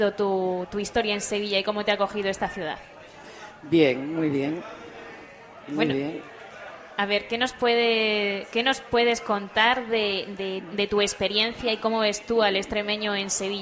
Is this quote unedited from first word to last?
yes; 0 cuts

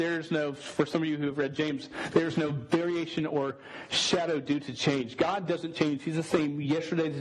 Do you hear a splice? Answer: no; 0 cuts

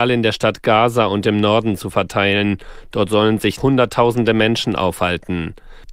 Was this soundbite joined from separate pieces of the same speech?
yes; 1 cut; at 3.6 s

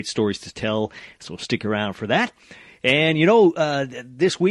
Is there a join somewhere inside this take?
no; 0 cuts

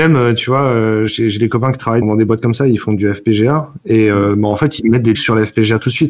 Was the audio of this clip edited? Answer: yes; 2 cuts; at 2.0 s, 5.1 s

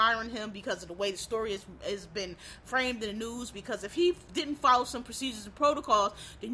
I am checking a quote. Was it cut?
no; 0 cuts

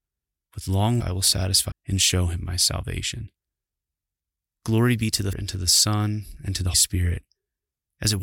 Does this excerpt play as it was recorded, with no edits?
no; 4 cuts; at 1.0 s, 1.7 s, 5.3 s, 6.7 s

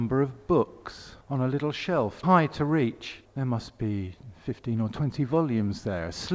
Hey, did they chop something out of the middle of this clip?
yes; 3 cuts; at 1.2 s, 2.2 s, 3.2 s

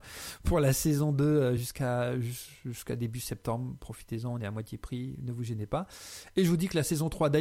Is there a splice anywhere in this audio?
no; 0 cuts

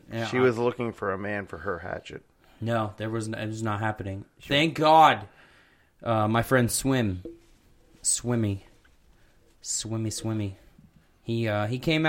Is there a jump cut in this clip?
no; 0 cuts

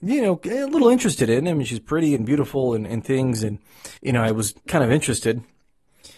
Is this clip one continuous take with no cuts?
no; 2 cuts; at 4.0 s, 4.7 s

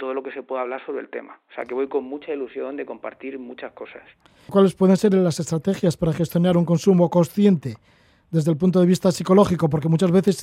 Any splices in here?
no; 0 cuts

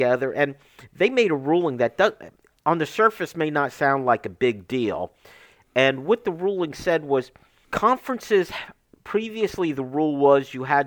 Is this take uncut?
yes; 0 cuts

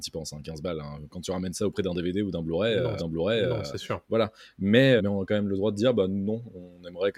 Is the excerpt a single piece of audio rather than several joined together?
no; 2 cuts; at 3.0 s, 5.0 s

